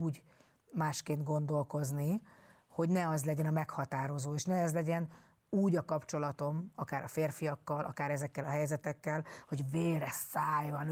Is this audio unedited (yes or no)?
yes